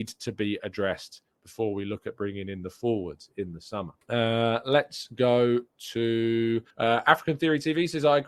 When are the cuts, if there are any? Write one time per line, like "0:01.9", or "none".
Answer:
0:04.0
0:06.7